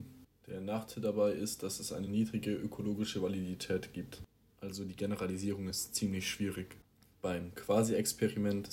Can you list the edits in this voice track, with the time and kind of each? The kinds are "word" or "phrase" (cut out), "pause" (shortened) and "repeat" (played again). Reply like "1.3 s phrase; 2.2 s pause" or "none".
none